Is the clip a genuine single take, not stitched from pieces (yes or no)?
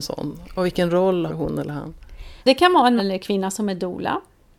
no